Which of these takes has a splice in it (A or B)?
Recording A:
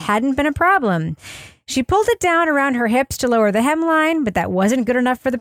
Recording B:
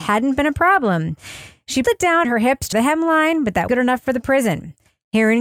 B